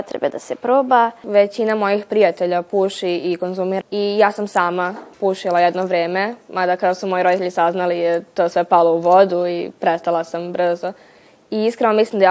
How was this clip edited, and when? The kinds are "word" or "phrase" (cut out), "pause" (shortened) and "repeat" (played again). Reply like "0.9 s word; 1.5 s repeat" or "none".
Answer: 3.8 s word; 5.1 s pause